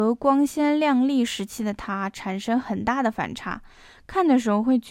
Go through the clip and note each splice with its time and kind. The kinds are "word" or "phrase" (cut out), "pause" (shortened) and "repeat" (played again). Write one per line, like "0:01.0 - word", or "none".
none